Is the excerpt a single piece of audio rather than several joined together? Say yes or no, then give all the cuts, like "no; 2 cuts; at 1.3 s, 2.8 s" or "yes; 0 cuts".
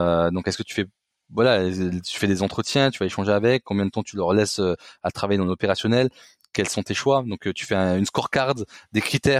yes; 0 cuts